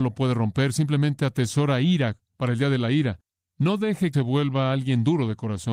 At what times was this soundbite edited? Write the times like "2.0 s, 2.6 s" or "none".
4.1 s